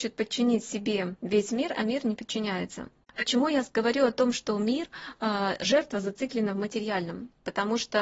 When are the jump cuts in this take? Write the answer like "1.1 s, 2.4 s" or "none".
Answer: none

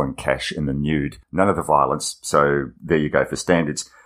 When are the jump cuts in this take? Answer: 1.2 s, 2.8 s

